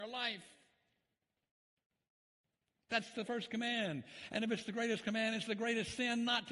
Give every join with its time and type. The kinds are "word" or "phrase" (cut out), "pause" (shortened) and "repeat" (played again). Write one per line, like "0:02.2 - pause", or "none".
none